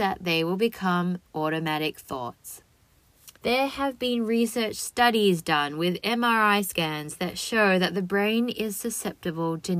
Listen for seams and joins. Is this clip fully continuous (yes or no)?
no